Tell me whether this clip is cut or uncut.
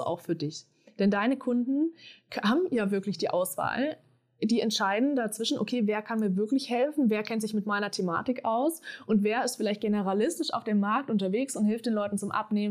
uncut